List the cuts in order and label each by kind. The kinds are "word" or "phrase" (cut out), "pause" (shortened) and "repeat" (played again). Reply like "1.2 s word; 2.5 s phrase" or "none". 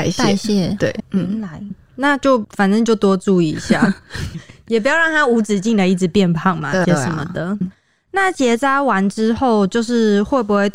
1.0 s word; 1.7 s word; 4.3 s word; 6.8 s word; 7.6 s word

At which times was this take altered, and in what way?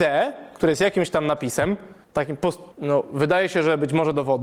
2.0 s pause; 2.7 s pause

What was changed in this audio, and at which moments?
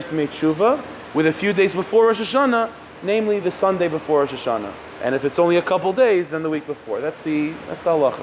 none

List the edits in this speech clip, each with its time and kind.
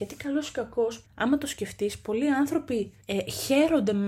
1.1 s pause; 3.0 s pause

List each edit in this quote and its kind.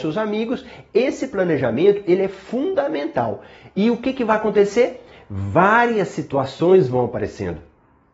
none

